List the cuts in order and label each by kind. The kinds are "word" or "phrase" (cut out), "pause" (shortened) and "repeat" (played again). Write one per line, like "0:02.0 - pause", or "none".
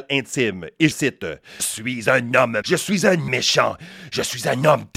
0:00.9 - word
0:01.6 - word
0:02.6 - word
0:03.3 - word